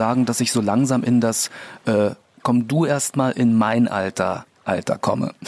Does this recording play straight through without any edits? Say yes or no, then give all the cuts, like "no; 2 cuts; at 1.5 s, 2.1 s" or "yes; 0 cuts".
yes; 0 cuts